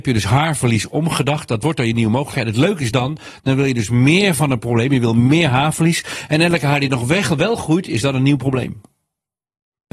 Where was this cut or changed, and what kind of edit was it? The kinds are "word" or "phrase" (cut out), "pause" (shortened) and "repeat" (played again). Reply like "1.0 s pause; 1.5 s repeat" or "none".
none